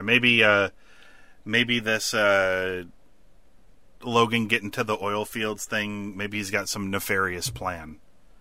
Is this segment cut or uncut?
uncut